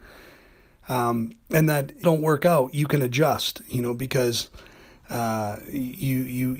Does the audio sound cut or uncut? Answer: cut